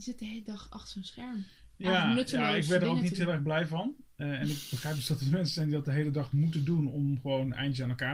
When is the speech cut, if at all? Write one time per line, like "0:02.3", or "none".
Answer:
none